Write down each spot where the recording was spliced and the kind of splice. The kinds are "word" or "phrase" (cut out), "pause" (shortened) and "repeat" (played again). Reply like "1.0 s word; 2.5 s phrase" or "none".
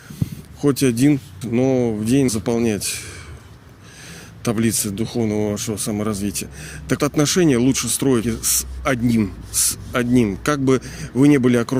1.4 s word; 2.3 s word; 7.0 s word; 8.2 s word